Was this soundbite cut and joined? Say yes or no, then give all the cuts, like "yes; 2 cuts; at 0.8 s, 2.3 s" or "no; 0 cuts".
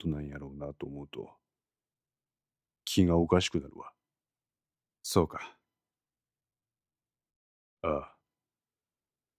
yes; 1 cut; at 4.7 s